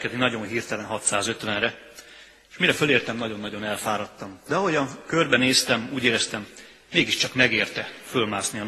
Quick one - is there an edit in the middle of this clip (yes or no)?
no